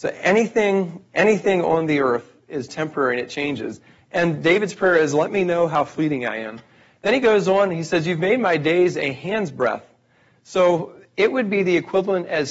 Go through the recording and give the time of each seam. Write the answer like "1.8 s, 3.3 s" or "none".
none